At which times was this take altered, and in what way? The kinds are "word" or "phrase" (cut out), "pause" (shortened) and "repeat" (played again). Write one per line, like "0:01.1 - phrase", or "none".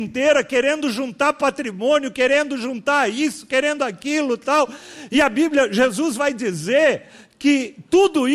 none